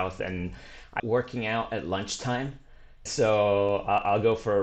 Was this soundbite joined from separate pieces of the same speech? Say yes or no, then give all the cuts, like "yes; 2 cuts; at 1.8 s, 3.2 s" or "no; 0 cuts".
yes; 2 cuts; at 1.0 s, 3.1 s